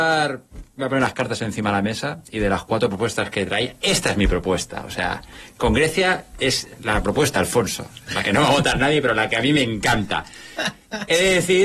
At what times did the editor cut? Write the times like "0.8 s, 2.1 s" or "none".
7.4 s